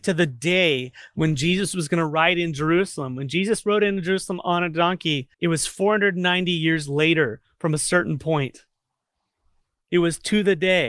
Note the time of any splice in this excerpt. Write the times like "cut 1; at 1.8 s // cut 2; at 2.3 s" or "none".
cut 1; at 5.3 s